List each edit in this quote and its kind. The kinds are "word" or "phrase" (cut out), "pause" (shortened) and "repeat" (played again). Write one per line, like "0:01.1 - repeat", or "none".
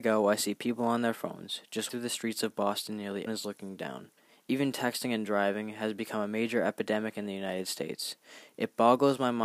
0:01.9 - word
0:03.3 - word
0:04.2 - pause